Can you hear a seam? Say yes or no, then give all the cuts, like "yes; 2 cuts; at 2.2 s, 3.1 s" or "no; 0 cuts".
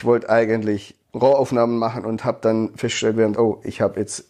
yes; 2 cuts; at 1.0 s, 3.3 s